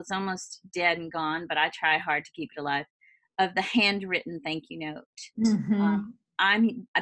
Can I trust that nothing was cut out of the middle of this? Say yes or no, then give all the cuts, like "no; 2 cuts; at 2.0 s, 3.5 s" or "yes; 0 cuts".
yes; 0 cuts